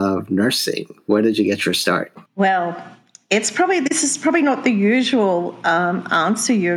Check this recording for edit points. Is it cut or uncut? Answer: cut